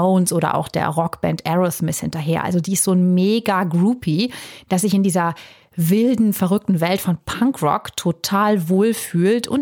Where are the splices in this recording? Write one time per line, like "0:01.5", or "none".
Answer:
none

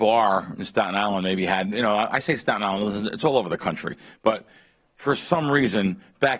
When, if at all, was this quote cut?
none

